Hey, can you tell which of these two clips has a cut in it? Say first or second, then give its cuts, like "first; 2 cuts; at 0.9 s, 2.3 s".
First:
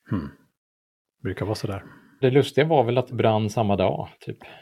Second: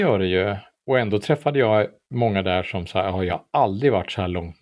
first; 2 cuts; at 2.2 s, 3.1 s